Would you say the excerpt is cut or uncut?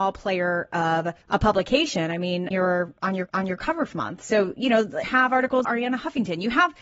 cut